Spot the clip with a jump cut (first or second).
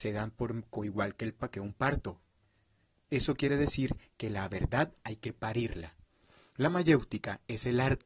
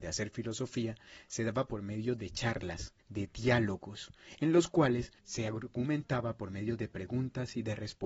second